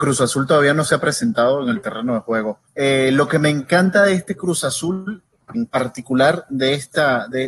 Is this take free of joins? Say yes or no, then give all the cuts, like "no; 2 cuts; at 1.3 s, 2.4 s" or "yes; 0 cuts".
no; 2 cuts; at 2.7 s, 5.5 s